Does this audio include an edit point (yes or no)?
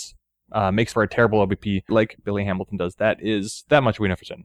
yes